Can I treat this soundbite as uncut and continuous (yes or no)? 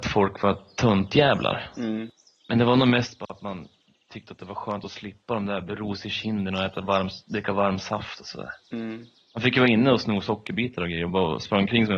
yes